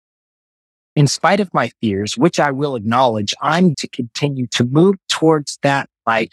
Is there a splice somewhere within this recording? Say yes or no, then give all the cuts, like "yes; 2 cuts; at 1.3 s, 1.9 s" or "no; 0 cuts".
yes; 1 cut; at 3.7 s